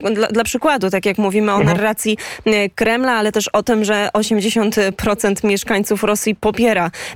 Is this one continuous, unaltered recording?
yes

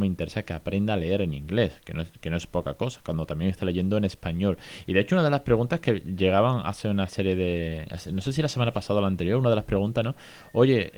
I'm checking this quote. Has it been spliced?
no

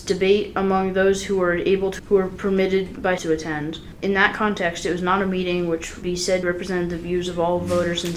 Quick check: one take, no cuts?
no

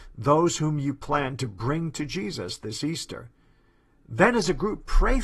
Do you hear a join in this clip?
no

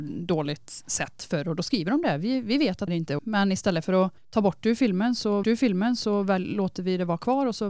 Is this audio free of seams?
no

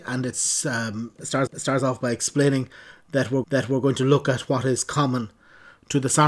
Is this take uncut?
no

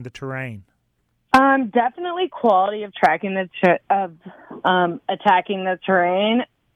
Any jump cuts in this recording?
no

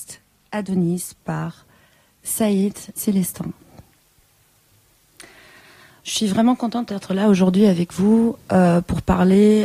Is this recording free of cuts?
no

